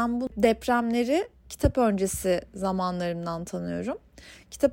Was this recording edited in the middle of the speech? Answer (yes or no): no